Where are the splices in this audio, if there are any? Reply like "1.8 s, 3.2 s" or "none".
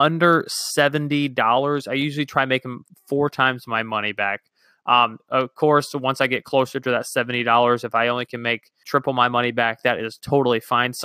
8.8 s

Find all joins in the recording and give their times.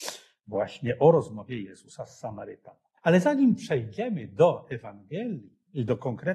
3.0 s

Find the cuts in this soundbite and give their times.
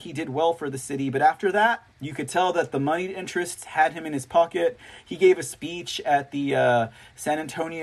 1.9 s

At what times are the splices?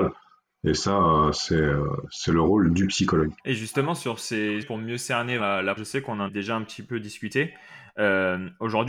3.4 s, 4.6 s, 5.4 s, 5.8 s, 6.3 s

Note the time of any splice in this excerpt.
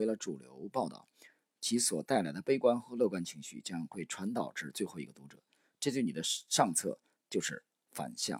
none

